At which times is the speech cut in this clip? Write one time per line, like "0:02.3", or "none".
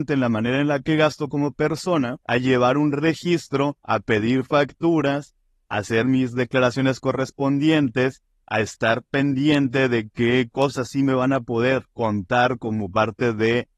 0:02.2
0:03.8

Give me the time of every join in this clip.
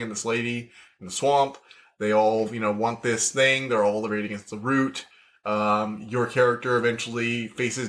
none

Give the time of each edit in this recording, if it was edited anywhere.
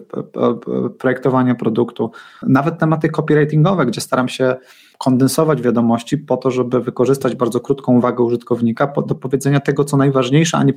none

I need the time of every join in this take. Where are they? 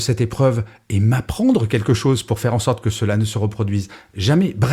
none

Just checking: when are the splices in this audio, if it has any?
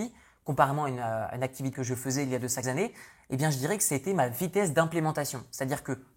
0:01.7
0:02.6

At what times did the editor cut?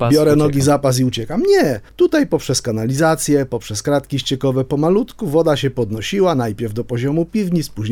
0:01.9

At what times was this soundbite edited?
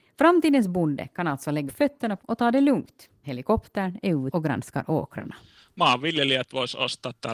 0:01.7
0:02.2
0:03.2
0:04.3

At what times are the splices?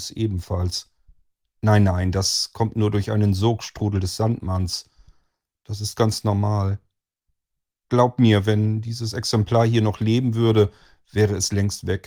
none

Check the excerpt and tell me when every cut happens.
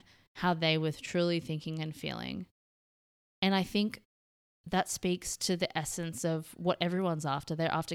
none

